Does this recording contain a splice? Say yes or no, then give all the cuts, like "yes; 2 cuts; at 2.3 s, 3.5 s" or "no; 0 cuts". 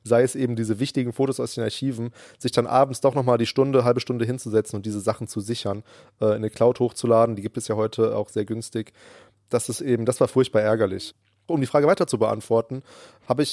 no; 0 cuts